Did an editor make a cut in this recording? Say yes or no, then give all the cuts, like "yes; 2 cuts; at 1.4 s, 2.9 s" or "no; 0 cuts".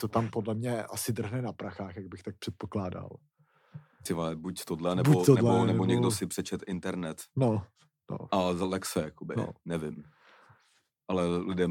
no; 0 cuts